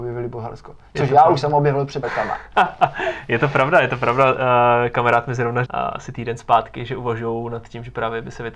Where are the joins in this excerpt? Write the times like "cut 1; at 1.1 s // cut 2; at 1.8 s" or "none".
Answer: cut 1; at 2.0 s // cut 2; at 5.6 s